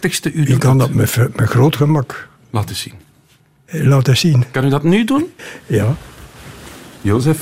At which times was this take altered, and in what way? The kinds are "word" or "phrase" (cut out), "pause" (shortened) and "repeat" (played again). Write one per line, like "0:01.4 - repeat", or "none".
none

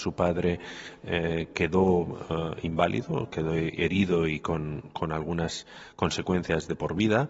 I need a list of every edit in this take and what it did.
none

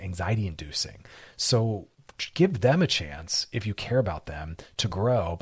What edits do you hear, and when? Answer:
none

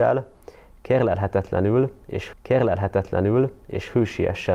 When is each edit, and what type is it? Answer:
0:02.3 - repeat

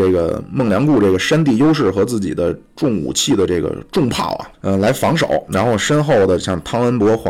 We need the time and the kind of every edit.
0:04.5 - pause

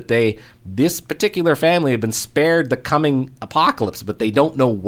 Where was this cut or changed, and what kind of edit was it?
none

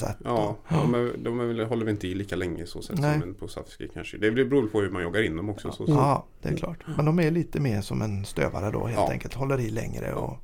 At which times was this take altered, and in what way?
none

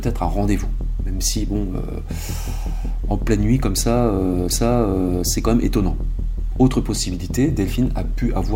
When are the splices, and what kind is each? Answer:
0:04.5 - repeat

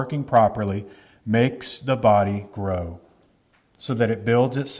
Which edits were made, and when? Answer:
none

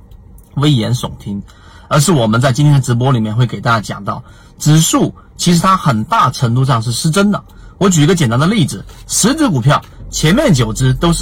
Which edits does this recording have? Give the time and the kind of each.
none

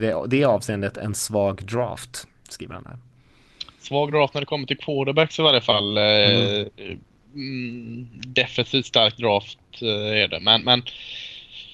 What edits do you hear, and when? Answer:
none

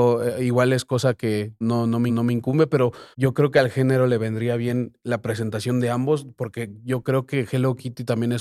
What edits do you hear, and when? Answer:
0:01.6 - word
0:02.1 - repeat
0:03.1 - pause

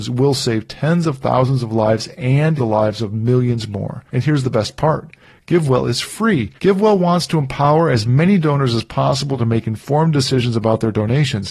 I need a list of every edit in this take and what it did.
0:02.6 - word
0:04.1 - pause
0:06.6 - pause

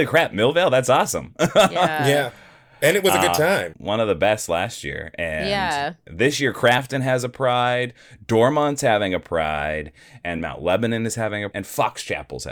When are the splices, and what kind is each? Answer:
0:03.7 - word
0:11.5 - word

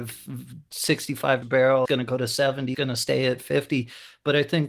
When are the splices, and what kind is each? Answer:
0:01.4 - word
0:01.8 - word
0:02.7 - word

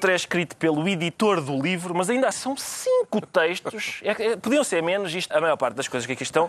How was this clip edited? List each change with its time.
0:02.3 - word
0:05.3 - word

